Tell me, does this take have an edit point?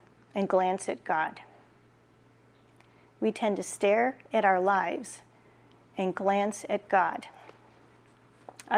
no; 0 cuts

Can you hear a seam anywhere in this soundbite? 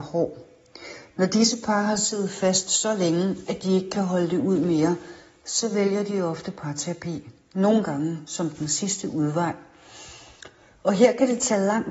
no; 0 cuts

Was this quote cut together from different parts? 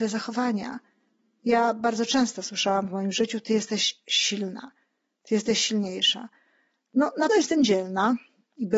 yes; 1 cut; at 7.3 s

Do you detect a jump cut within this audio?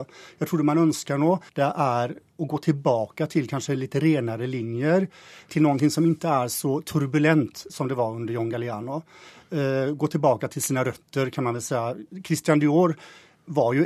yes; 3 cuts; at 1.5 s, 5.5 s, 7.7 s

